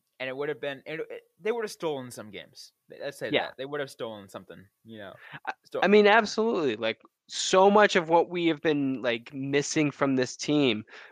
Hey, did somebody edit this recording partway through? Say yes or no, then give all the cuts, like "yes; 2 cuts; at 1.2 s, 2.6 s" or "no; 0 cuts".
no; 0 cuts